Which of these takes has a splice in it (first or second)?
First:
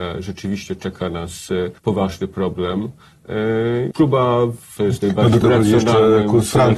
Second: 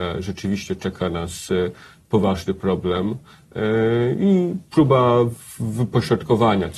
first